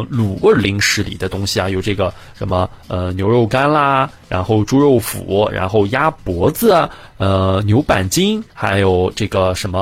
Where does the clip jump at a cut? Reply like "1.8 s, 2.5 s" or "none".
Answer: 8.5 s